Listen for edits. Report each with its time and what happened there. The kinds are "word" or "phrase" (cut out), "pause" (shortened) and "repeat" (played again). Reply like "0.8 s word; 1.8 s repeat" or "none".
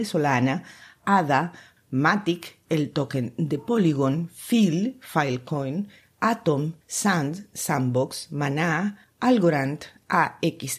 6.8 s pause